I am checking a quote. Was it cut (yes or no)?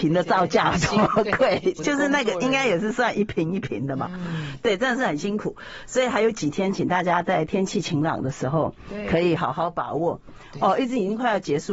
yes